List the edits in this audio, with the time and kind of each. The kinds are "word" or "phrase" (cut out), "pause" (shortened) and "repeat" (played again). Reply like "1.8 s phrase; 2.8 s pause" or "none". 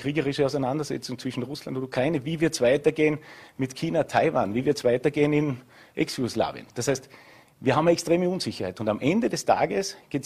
none